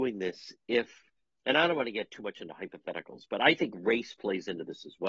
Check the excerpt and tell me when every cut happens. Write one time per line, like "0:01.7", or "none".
none